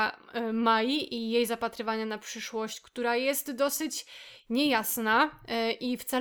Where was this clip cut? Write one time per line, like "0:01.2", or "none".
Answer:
none